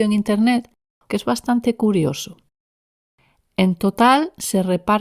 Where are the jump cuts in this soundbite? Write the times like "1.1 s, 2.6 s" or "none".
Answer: 1.1 s